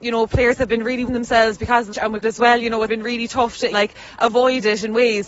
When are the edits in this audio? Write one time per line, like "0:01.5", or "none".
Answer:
0:01.1
0:01.9
0:02.2
0:02.9
0:03.7